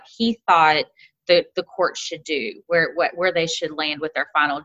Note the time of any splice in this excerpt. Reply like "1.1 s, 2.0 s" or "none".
none